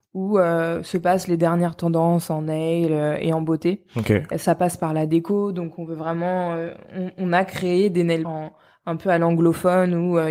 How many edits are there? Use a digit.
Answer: 1